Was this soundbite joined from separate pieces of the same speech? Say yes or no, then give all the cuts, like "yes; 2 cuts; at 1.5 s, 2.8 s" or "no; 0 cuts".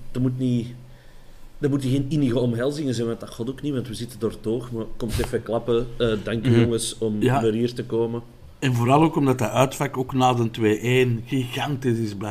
no; 0 cuts